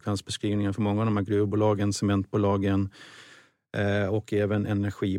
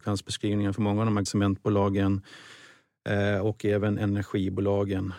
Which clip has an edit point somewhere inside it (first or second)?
second